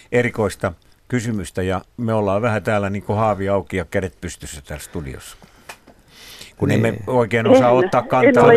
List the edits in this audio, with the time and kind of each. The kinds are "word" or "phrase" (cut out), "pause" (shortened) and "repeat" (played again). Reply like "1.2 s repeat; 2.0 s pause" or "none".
none

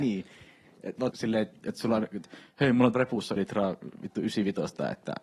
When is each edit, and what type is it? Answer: 1.1 s word; 2.9 s word; 3.4 s word

